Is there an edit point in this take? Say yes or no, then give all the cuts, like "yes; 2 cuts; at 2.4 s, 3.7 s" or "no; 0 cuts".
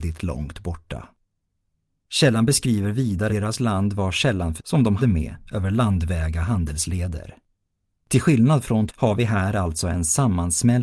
yes; 4 cuts; at 3.3 s, 4.6 s, 5.0 s, 8.9 s